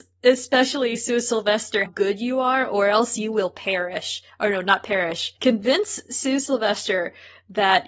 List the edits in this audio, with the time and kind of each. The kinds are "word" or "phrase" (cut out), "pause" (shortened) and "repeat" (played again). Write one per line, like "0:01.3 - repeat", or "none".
0:01.9 - word
0:05.4 - pause